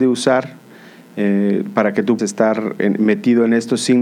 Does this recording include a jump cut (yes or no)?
yes